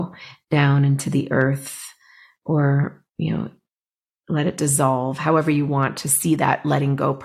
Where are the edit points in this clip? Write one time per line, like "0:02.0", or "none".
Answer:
none